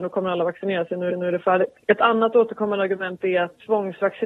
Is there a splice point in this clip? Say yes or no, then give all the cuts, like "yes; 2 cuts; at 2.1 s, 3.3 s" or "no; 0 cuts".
yes; 1 cut; at 1.1 s